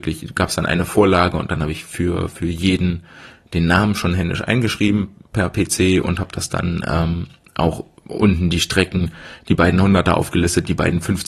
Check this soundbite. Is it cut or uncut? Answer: uncut